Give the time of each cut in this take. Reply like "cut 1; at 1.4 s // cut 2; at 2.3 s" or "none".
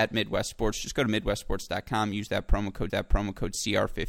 cut 1; at 2.9 s